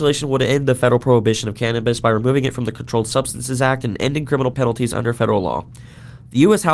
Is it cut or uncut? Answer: cut